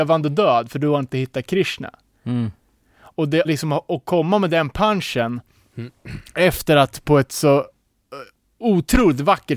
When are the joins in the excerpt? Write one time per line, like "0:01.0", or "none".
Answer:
0:03.4